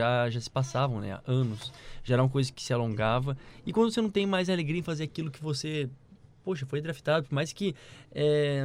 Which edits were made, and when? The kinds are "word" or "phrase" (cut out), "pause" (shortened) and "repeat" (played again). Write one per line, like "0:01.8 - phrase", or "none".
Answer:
none